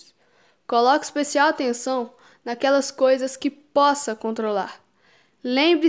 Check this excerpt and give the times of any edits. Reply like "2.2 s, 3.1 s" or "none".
none